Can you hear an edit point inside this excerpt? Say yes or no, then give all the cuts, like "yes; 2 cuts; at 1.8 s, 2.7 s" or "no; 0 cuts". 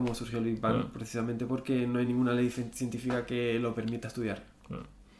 no; 0 cuts